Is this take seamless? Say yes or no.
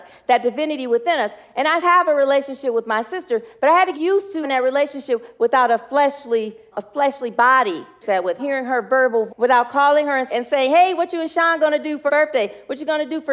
no